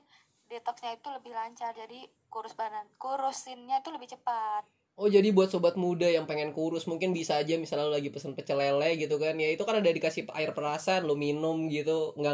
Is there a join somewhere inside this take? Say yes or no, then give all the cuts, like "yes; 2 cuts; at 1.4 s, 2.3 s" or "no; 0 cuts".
no; 0 cuts